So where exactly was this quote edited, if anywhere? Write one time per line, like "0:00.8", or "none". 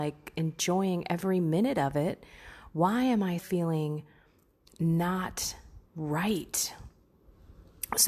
0:03.4
0:05.9